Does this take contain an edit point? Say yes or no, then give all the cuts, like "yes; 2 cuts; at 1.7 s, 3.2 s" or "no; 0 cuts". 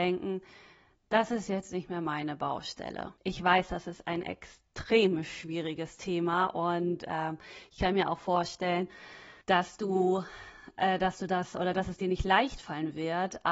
yes; 2 cuts; at 3.2 s, 9.4 s